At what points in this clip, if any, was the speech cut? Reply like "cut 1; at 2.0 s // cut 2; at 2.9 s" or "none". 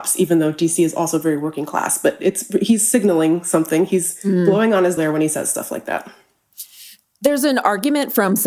cut 1; at 5.0 s